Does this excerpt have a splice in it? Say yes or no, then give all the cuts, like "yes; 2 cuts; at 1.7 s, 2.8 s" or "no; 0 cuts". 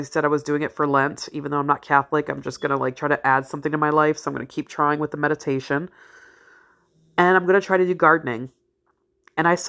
no; 0 cuts